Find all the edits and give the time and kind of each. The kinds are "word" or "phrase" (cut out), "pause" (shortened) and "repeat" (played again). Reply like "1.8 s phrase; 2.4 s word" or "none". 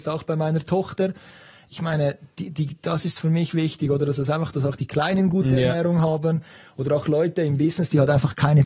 none